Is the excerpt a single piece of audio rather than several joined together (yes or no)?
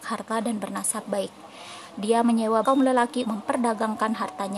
no